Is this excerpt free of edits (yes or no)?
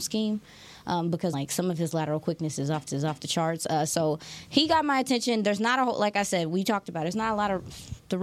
no